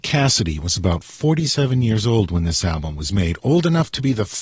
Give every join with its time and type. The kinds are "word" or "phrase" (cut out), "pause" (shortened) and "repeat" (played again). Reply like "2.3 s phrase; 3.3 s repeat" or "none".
none